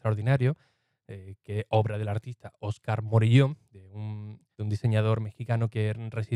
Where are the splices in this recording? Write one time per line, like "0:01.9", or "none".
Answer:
0:04.5